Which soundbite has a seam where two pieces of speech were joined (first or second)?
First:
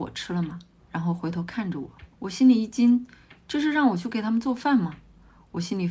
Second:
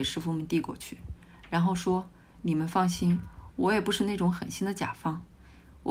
first